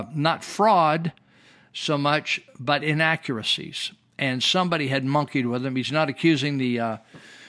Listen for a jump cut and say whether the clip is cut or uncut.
uncut